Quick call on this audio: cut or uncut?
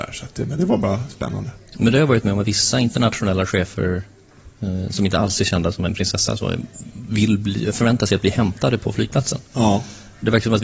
uncut